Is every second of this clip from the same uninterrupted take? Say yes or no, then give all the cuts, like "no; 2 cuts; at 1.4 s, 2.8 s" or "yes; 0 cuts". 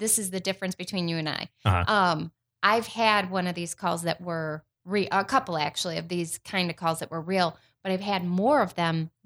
yes; 0 cuts